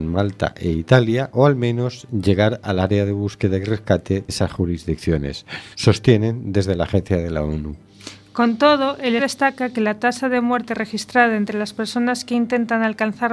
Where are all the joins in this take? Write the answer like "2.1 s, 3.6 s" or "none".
4.3 s, 5.7 s, 9.2 s